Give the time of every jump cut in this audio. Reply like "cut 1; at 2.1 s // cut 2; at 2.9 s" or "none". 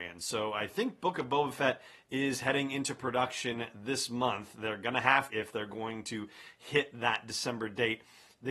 cut 1; at 5.3 s

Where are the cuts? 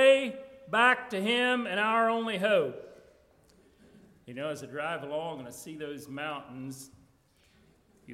none

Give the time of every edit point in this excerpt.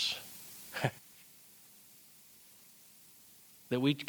cut 1; at 1.0 s

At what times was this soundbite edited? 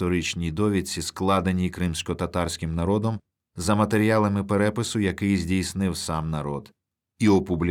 none

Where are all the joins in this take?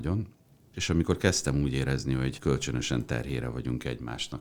cut 1; at 2.4 s

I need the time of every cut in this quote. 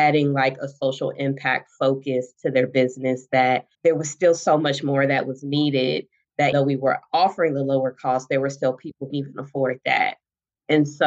cut 1; at 3.7 s // cut 2; at 6.5 s // cut 3; at 9.1 s

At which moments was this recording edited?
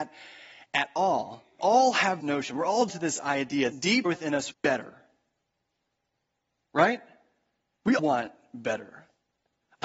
cut 1; at 1.6 s // cut 2; at 2.2 s // cut 3; at 2.9 s // cut 4; at 3.7 s // cut 5; at 4.1 s // cut 6; at 4.5 s // cut 7; at 8.0 s

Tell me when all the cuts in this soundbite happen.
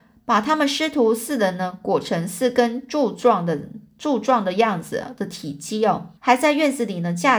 cut 1; at 6.2 s

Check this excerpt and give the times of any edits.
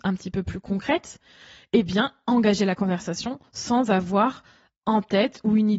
none

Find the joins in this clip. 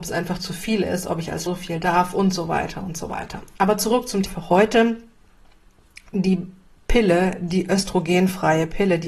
cut 1; at 1.5 s // cut 2; at 4.3 s

